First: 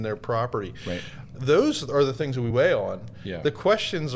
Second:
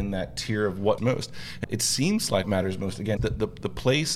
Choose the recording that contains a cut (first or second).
second